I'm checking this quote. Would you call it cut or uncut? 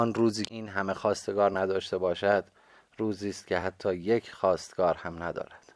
uncut